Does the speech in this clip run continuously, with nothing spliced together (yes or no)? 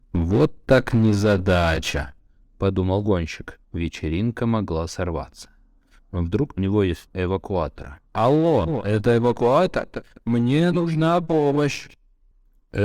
no